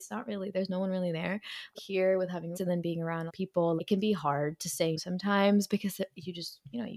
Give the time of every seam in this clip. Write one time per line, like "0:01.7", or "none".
0:01.7
0:02.5
0:03.3
0:03.8
0:05.0